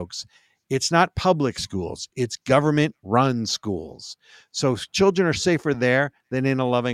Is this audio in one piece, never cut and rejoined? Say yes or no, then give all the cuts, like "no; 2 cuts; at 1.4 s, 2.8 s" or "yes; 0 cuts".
yes; 0 cuts